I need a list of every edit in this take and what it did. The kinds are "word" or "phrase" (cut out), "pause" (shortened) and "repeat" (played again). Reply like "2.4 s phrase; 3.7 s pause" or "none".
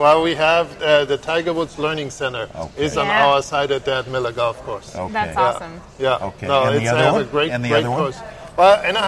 none